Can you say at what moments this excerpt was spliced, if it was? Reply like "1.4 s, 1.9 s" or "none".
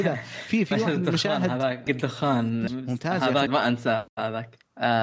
1.9 s, 2.7 s, 3.5 s